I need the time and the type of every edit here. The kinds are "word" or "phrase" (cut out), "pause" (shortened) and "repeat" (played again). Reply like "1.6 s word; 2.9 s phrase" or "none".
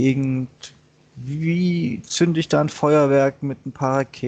none